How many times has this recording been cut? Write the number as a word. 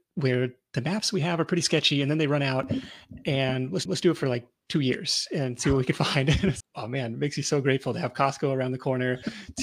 two